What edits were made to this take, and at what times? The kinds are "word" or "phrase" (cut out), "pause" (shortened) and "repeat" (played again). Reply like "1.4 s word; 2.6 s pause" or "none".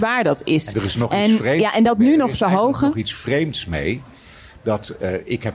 none